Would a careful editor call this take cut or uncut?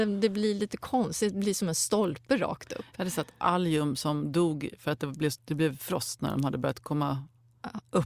uncut